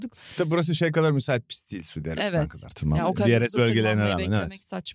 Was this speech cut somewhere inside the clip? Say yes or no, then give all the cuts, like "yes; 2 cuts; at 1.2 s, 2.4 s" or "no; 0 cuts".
no; 0 cuts